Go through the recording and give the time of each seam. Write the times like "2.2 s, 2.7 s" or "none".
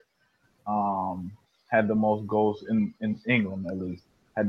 none